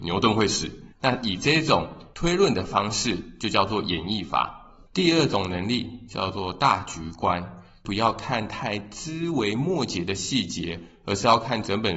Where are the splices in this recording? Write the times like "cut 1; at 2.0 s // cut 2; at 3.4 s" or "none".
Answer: cut 1; at 0.9 s // cut 2; at 4.9 s